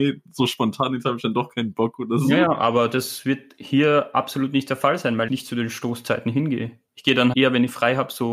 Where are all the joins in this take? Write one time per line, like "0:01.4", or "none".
0:05.3
0:06.9
0:07.3